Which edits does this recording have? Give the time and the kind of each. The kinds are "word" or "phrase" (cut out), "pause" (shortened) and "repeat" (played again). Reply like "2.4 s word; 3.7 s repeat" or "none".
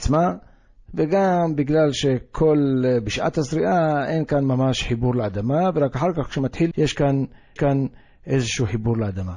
6.7 s word; 7.6 s repeat